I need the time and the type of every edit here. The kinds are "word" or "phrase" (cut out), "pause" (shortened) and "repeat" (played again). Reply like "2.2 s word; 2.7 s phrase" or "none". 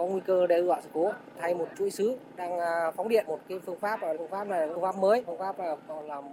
3.3 s word; 4.1 s word; 5.3 s word